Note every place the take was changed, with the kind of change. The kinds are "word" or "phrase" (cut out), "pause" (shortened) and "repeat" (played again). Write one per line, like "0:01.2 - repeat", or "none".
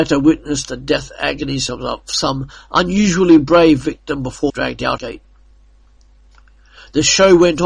0:04.5 - phrase
0:05.0 - phrase

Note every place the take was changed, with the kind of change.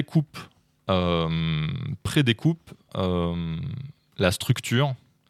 0:02.9 - word

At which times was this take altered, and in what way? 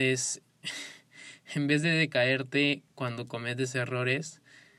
none

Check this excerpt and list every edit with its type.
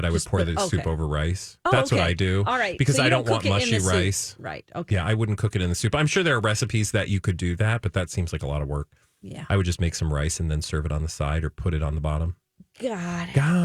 none

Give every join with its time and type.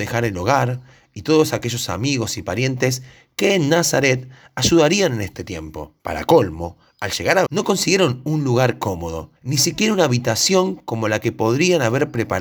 0:06.0 - pause
0:07.5 - word
0:09.4 - pause

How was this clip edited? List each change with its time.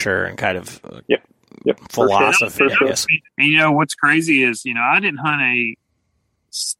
0:01.8 - pause
0:03.3 - pause

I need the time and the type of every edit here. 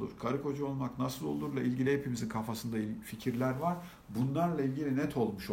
none

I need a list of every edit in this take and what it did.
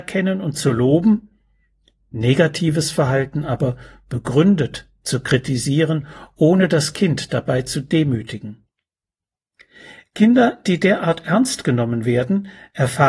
none

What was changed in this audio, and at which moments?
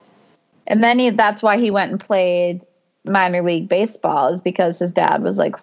none

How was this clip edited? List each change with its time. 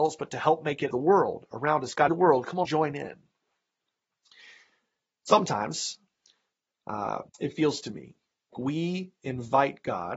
0:00.9 - phrase
0:02.1 - phrase
0:02.6 - word
0:07.3 - pause
0:08.5 - word

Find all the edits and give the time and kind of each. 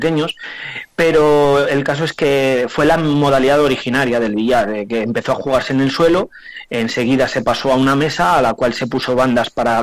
none

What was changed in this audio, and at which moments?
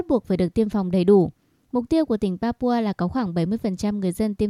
none

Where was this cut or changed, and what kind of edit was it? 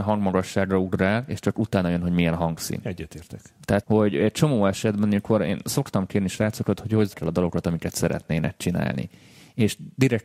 0:03.8 - word
0:07.1 - word

